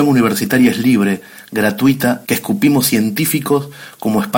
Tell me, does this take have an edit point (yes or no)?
yes